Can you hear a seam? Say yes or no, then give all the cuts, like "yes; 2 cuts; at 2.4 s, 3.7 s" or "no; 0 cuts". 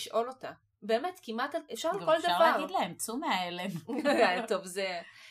yes; 1 cut; at 1.7 s